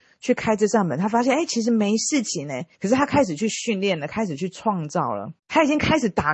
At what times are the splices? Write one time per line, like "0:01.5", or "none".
0:02.7
0:05.4